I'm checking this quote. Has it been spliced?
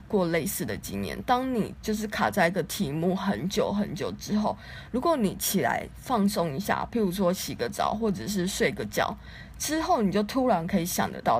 no; 0 cuts

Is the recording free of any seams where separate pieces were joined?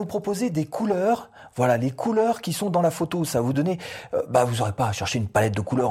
yes; 0 cuts

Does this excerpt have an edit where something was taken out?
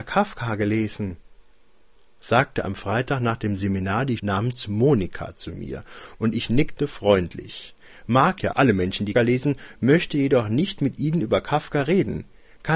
yes; 3 cuts; at 4.2 s, 8.5 s, 9.1 s

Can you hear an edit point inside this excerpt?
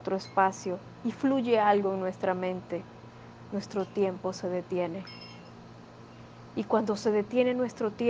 no; 0 cuts

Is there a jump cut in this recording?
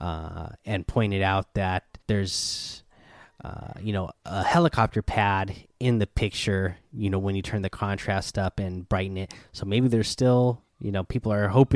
yes; 2 cuts; at 2.0 s, 10.7 s

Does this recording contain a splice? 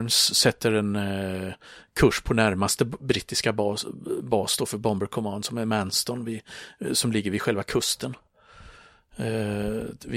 no; 0 cuts

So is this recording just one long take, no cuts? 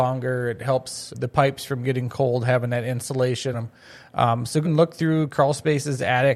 no; 3 cuts; at 1.1 s, 3.5 s, 4.6 s

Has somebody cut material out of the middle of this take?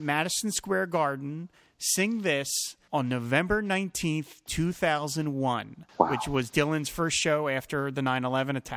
no; 0 cuts

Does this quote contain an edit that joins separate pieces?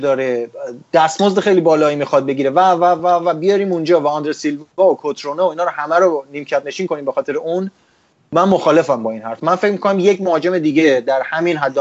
no; 0 cuts

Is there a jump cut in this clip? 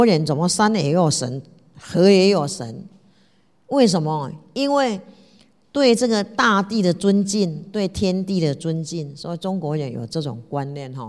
no; 0 cuts

